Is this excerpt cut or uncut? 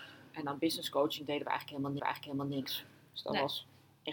cut